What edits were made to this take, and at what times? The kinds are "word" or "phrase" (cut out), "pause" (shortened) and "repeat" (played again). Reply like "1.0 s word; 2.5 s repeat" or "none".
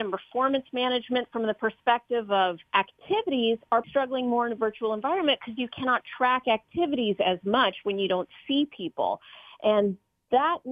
2.7 s pause; 3.8 s word